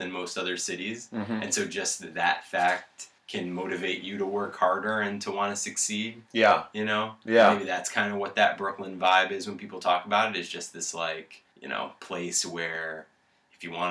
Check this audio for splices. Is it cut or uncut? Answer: cut